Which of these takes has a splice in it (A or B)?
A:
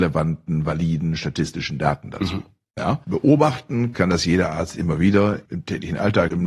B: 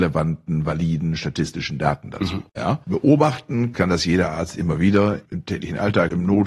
B